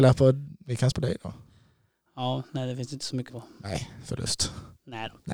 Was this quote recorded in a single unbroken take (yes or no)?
no